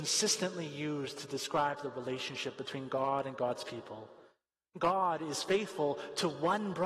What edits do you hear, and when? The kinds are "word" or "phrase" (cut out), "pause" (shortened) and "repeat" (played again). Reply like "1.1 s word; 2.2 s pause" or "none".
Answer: none